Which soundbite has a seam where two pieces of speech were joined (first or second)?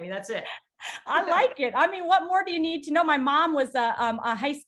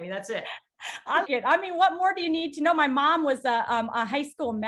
second